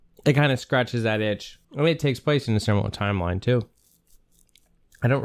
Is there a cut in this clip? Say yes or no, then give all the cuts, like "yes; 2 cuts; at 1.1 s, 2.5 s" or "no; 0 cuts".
yes; 1 cut; at 1.6 s